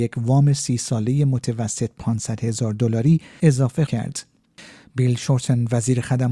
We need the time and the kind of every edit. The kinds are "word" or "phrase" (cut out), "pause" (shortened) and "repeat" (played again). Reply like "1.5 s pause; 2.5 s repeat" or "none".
3.9 s word